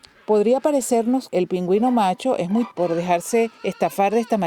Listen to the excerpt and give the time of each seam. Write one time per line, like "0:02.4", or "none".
0:01.3
0:02.7
0:03.5